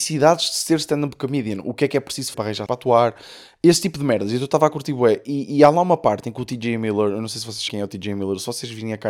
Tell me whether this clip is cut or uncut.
cut